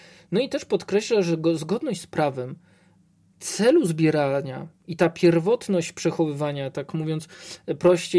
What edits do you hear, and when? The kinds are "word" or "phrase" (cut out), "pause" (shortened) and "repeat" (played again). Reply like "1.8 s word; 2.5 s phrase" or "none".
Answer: none